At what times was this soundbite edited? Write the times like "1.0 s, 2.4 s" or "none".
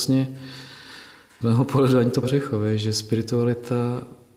1.4 s, 2.2 s